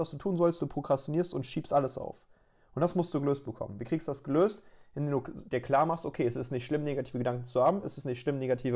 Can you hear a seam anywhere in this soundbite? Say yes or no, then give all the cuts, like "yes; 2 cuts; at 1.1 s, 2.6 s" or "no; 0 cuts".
no; 0 cuts